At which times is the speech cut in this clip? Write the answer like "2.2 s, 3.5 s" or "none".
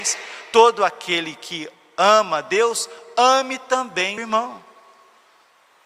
4.2 s